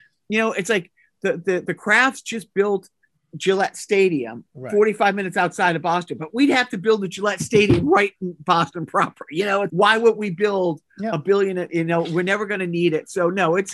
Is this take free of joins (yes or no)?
no